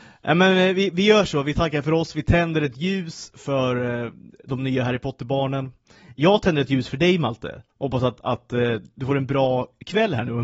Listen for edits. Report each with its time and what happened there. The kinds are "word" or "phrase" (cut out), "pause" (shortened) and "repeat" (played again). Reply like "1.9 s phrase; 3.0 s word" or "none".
none